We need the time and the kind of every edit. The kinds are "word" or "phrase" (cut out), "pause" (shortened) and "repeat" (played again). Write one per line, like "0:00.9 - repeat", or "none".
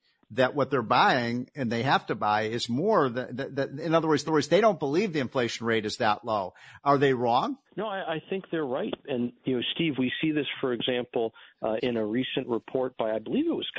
0:04.3 - repeat
0:07.6 - pause
0:10.0 - word
0:11.8 - word